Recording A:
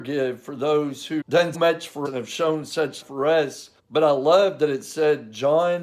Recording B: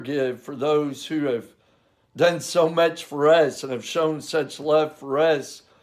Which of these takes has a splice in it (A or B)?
A